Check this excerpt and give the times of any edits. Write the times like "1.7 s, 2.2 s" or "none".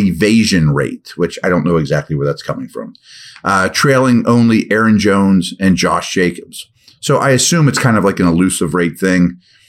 none